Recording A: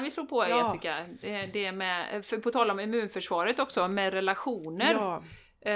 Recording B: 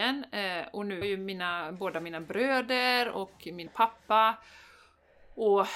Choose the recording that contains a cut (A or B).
B